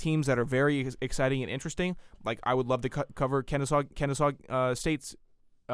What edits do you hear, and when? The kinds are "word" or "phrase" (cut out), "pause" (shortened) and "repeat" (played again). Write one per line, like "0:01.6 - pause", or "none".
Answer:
0:03.9 - repeat